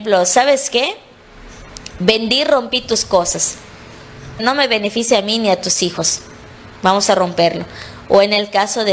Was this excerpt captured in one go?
no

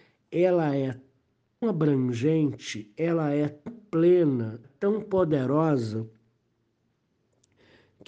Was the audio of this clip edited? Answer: yes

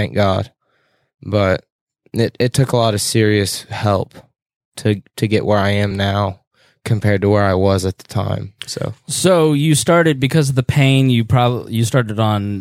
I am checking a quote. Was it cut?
no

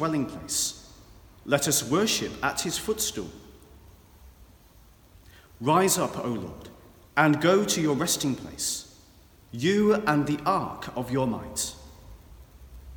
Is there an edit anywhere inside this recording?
no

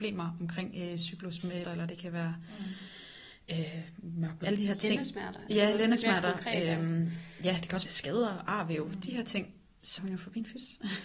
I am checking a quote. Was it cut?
yes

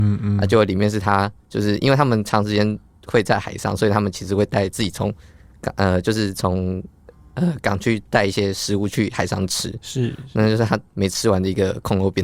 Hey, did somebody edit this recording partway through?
no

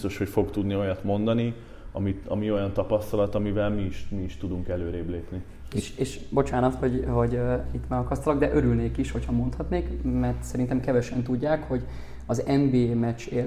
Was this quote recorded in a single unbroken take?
yes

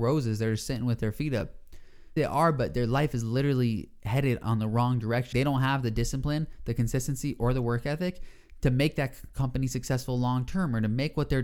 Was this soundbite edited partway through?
yes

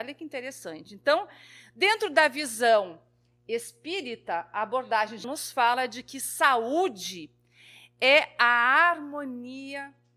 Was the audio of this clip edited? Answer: yes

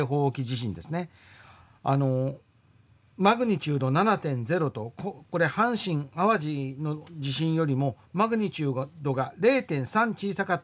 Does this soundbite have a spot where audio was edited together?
no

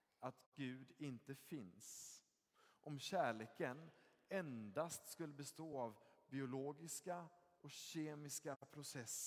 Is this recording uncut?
yes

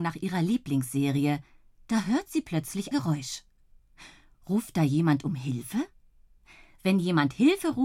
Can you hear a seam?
yes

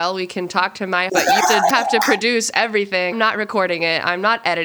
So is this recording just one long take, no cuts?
no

